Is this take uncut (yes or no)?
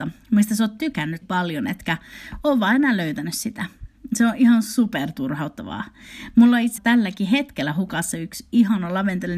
no